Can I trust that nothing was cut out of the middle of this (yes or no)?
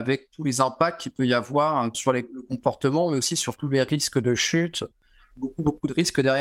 no